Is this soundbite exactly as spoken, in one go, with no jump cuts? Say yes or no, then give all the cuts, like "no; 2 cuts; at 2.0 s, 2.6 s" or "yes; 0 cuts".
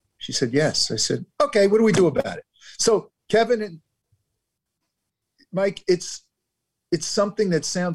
yes; 0 cuts